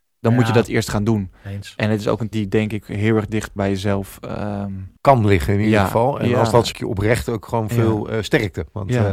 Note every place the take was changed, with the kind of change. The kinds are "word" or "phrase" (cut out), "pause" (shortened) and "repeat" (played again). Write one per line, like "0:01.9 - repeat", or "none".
0:02.3 - word
0:03.6 - word
0:05.0 - pause
0:06.7 - phrase